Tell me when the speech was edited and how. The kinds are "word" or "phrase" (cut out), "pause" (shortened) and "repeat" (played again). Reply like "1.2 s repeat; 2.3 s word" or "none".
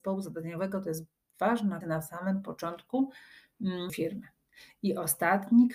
1.8 s word; 3.9 s phrase